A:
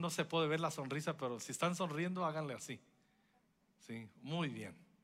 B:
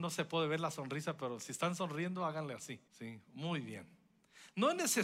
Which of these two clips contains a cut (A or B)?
B